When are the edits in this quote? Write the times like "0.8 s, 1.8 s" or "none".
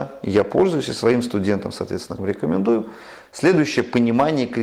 2.2 s